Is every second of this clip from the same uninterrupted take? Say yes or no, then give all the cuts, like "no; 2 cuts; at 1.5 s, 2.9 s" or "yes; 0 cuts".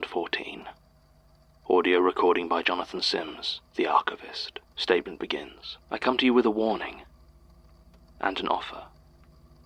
no; 3 cuts; at 3.7 s, 4.7 s, 5.8 s